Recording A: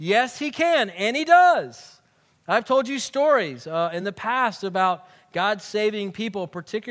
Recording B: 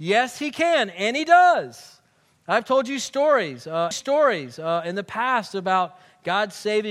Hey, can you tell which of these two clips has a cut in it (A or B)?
B